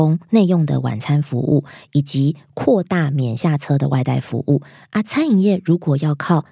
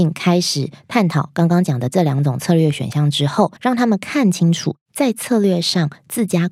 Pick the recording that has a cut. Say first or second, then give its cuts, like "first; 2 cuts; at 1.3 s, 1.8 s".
second; 1 cut; at 3.6 s